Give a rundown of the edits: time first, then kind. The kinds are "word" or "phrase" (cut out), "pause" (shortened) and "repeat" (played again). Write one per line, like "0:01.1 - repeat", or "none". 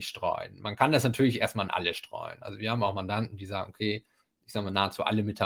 none